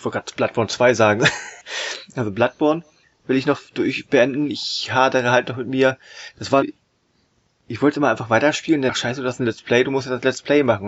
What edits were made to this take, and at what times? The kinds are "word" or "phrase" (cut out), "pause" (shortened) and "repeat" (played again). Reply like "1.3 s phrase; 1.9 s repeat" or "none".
1.6 s pause; 3.0 s pause; 6.6 s phrase

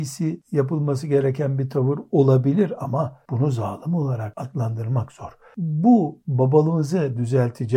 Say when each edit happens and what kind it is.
none

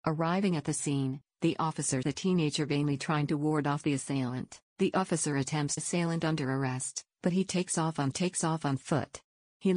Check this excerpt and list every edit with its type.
2.0 s word; 4.7 s pause; 5.8 s phrase; 8.1 s repeat

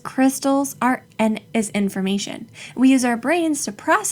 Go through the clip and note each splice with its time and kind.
1.0 s word; 1.5 s word

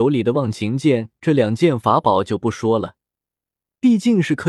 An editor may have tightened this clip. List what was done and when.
none

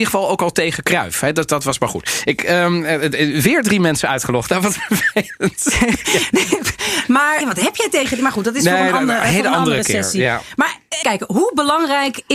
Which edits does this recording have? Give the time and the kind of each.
7.4 s word; 11.0 s word

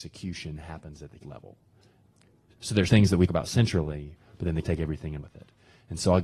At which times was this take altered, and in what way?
1.2 s word; 2.9 s word; 3.3 s word; 4.6 s word; 5.2 s word

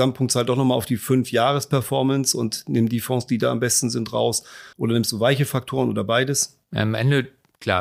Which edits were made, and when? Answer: 4.7 s pause; 6.6 s pause

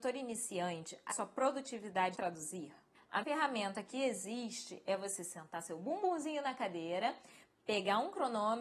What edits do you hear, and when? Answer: 1.1 s word; 2.1 s word; 3.2 s word

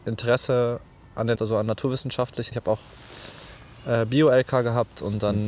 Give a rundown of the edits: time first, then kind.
1.4 s word; 2.5 s word

